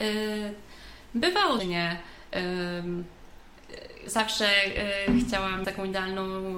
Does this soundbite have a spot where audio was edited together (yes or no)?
yes